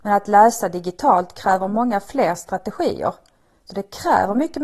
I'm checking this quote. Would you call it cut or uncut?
uncut